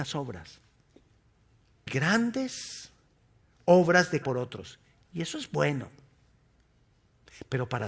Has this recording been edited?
yes; 2 cuts; at 1.9 s, 4.2 s

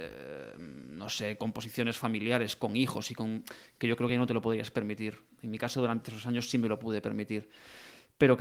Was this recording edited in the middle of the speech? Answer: no; 0 cuts

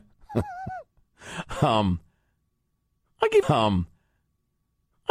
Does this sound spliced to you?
yes; 1 cut; at 3.4 s

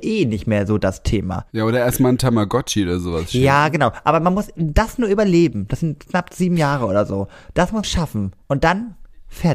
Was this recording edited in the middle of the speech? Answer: yes; 2 cuts; at 7.8 s, 8.4 s

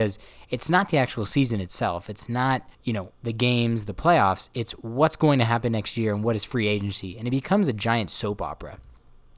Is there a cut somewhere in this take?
yes; 1 cut; at 2.7 s

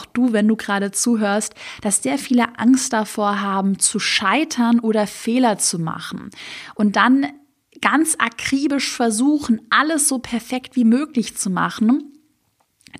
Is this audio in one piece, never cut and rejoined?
yes; 0 cuts

